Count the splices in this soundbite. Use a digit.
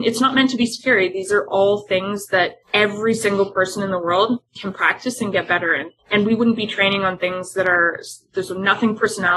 2